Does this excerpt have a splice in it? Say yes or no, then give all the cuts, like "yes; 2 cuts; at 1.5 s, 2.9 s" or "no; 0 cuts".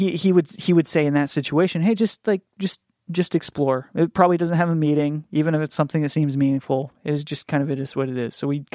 no; 0 cuts